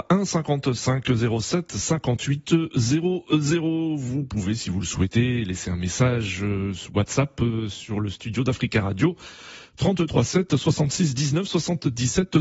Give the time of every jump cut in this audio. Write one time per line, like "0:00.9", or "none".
none